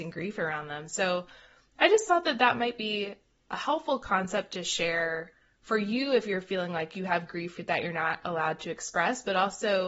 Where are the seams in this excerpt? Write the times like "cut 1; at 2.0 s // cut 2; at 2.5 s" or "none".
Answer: none